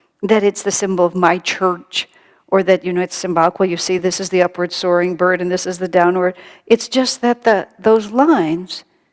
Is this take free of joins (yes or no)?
yes